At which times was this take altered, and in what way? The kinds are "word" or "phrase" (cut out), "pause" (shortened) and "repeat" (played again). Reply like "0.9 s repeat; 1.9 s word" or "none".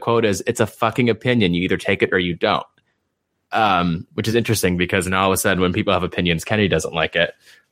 none